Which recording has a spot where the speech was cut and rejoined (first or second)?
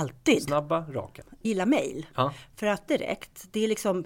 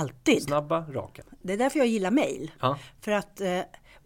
first